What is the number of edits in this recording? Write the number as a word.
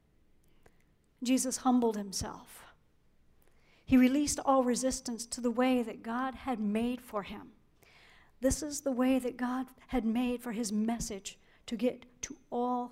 zero